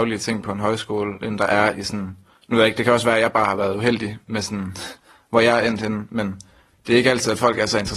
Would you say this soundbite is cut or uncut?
uncut